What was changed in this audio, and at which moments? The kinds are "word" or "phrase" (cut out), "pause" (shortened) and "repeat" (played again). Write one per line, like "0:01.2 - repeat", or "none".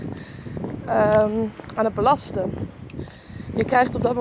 none